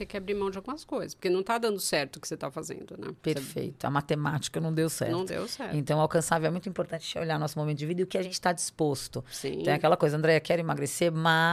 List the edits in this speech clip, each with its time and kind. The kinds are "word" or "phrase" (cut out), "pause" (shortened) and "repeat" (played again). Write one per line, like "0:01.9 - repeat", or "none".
0:03.2 - pause